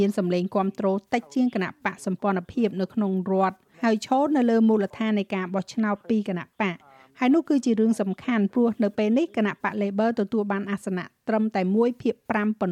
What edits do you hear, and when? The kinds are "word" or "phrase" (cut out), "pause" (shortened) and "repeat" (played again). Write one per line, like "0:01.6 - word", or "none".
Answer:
0:03.7 - word